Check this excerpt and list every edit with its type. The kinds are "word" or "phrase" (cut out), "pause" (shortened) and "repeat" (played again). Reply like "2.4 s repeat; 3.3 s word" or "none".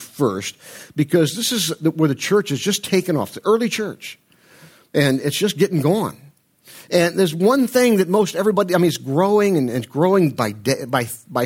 none

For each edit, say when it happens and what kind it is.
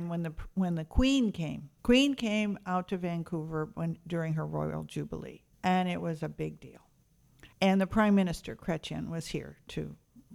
1.8 s pause; 5.5 s pause; 7.5 s pause

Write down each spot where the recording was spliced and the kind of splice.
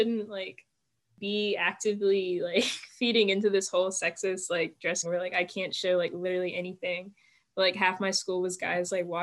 5.0 s phrase

